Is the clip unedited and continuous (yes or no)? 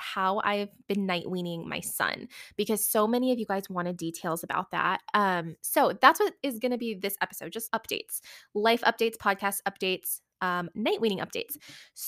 no